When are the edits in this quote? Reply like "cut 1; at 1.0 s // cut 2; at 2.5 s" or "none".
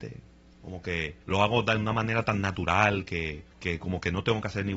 cut 1; at 1.2 s // cut 2; at 3.5 s

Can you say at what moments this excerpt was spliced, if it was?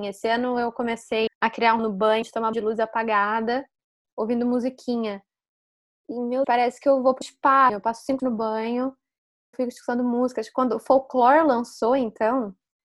cut 1; at 1.3 s // cut 2; at 1.8 s // cut 3; at 2.2 s // cut 4; at 2.5 s // cut 5; at 6.4 s // cut 6; at 7.2 s // cut 7; at 7.7 s // cut 8; at 8.2 s // cut 9; at 9.5 s

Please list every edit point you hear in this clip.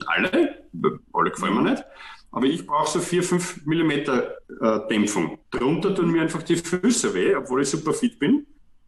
cut 1; at 4.4 s // cut 2; at 5.4 s

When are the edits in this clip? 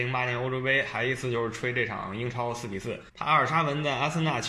cut 1; at 3.1 s

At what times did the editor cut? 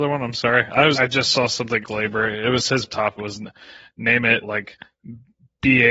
cut 1; at 0.9 s // cut 2; at 1.8 s // cut 3; at 2.9 s // cut 4; at 3.2 s // cut 5; at 4.4 s

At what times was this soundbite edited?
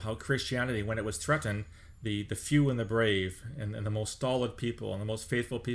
none

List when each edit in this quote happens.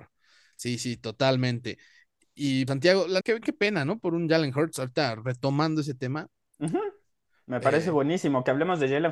cut 1; at 2.7 s // cut 2; at 3.2 s

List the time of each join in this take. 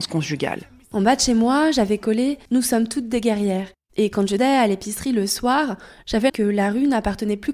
cut 1; at 2.5 s // cut 2; at 4.4 s // cut 3; at 6.3 s

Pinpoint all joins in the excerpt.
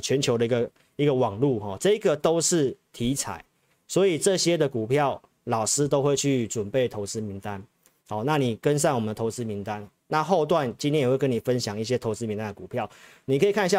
none

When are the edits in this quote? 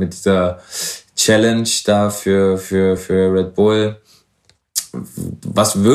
none

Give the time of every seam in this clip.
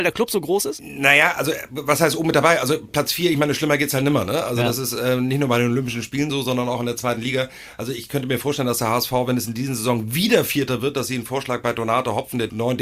none

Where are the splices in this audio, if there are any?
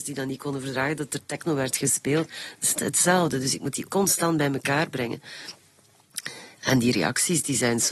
cut 1; at 2.8 s // cut 2; at 3.8 s

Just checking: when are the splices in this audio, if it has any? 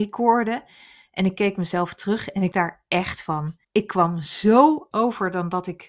cut 1; at 2.5 s // cut 2; at 3.6 s // cut 3; at 4.9 s

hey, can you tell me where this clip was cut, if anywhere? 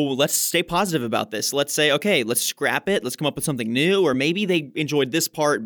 none

